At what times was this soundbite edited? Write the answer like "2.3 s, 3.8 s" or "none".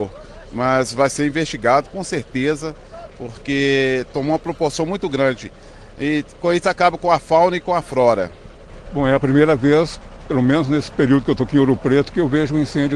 none